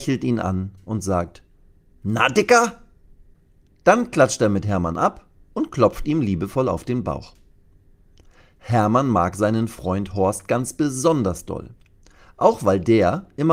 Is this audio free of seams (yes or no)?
yes